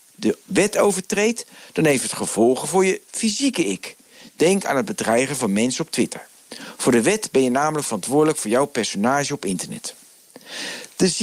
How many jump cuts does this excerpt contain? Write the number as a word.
zero